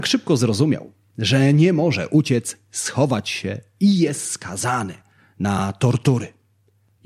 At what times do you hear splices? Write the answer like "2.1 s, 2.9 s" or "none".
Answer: none